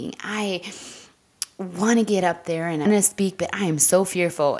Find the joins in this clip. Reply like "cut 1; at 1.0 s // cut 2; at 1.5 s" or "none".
cut 1; at 2.9 s